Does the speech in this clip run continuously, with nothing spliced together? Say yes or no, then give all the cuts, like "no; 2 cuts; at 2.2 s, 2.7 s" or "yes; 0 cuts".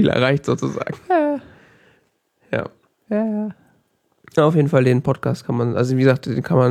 no; 1 cut; at 2.9 s